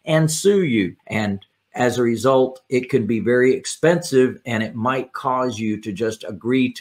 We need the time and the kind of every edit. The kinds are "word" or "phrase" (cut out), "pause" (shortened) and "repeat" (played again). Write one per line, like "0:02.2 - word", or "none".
0:01.0 - pause